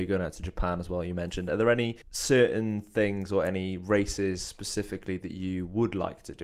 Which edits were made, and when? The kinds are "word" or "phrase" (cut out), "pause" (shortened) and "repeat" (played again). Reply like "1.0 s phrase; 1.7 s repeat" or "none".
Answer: 2.0 s pause